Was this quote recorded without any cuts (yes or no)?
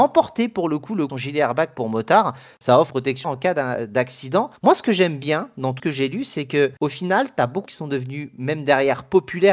no